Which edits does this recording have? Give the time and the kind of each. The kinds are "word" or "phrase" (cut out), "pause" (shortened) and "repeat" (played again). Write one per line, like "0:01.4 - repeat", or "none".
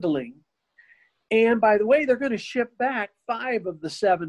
none